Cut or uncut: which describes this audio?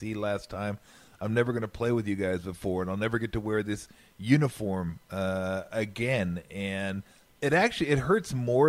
uncut